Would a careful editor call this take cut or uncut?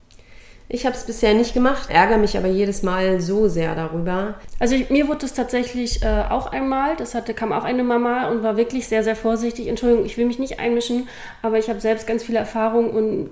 cut